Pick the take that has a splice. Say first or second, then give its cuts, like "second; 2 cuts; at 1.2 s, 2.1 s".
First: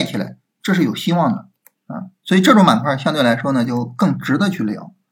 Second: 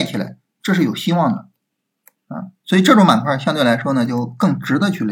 first; 1 cut; at 1.6 s